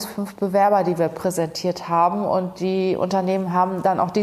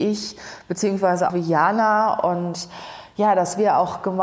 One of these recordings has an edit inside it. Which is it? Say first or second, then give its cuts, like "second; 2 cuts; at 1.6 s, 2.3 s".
second; 1 cut; at 1.3 s